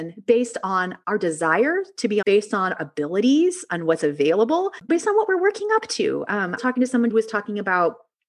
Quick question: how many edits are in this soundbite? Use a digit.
6